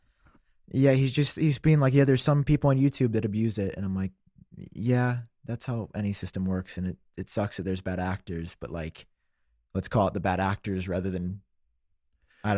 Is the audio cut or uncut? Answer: uncut